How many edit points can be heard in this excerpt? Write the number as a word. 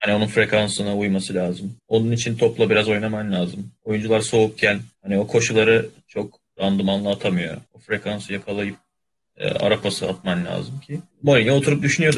six